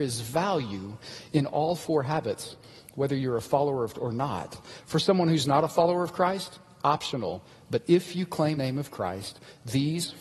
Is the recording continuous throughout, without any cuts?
no; 2 cuts; at 3.9 s, 8.5 s

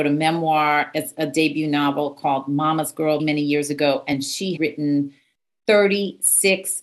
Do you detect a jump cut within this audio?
yes; 2 cuts; at 3.2 s, 4.6 s

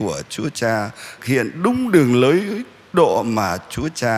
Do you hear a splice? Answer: yes; 2 cuts; at 1.2 s, 2.9 s

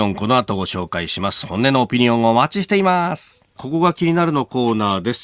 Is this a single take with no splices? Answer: no; 1 cut; at 3.5 s

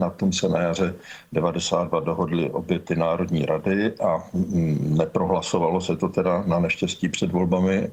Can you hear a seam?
no; 0 cuts

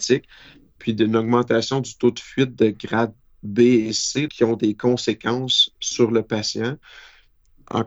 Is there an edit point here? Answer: yes; 1 cut; at 4.3 s

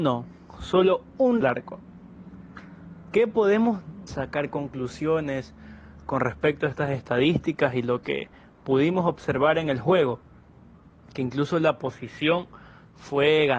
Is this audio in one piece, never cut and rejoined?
no; 2 cuts; at 1.4 s, 4.1 s

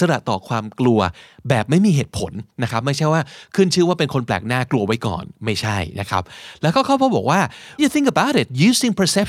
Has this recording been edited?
yes; 1 cut; at 7.8 s

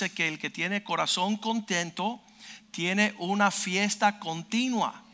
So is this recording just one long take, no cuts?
yes; 0 cuts

